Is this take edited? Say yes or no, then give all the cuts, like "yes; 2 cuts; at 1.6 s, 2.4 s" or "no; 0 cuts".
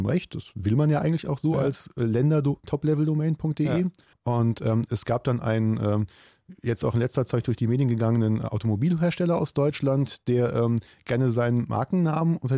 yes; 1 cut; at 4.1 s